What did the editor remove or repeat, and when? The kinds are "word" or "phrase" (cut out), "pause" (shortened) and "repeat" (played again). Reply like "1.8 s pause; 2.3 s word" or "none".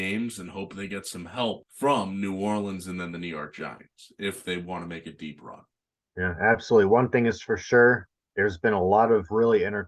none